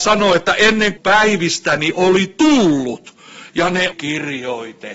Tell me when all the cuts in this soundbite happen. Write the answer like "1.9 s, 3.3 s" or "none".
1.0 s, 3.5 s, 3.9 s